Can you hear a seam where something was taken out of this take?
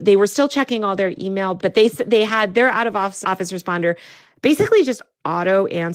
no; 0 cuts

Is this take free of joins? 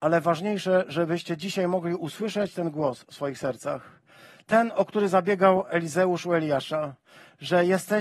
yes; 0 cuts

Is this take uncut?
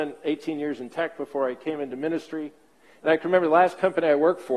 yes; 0 cuts

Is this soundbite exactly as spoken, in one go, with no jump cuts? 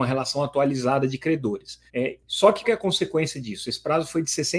no; 2 cuts; at 1.9 s, 2.6 s

